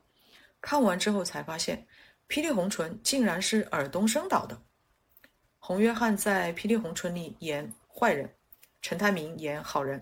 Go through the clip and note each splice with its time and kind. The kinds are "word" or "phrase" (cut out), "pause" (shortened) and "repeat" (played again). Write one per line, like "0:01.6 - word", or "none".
0:07.8 - pause